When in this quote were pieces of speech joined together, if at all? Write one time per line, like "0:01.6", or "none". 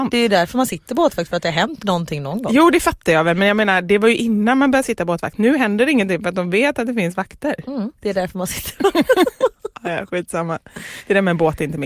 none